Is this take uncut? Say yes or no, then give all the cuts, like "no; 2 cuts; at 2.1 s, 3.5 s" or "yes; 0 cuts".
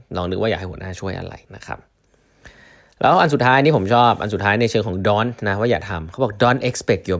no; 1 cut; at 1.4 s